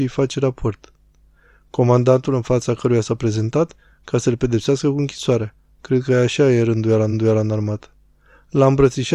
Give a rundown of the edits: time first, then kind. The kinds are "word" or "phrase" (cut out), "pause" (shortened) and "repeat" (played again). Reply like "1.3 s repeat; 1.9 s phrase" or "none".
7.1 s repeat